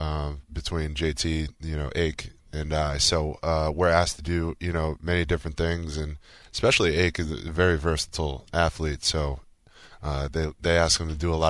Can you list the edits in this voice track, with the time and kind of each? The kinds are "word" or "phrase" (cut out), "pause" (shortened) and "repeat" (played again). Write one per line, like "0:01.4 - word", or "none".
none